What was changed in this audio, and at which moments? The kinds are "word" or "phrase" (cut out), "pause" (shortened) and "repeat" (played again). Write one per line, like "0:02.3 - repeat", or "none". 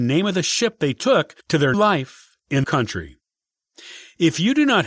0:01.4 - pause
0:01.7 - word
0:02.6 - phrase